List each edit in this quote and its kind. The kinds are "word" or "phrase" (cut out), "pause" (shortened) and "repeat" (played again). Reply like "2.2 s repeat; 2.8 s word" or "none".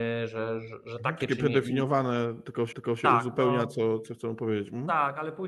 2.7 s repeat